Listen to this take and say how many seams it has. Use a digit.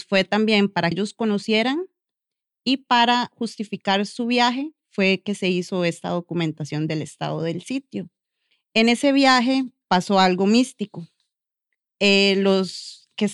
1